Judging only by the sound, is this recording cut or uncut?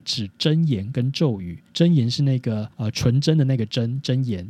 cut